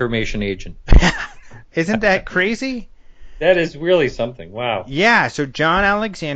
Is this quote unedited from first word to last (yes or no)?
yes